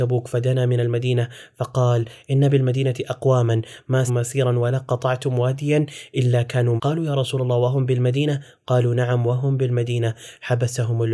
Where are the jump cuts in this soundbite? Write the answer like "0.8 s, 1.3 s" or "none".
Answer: 4.1 s, 6.8 s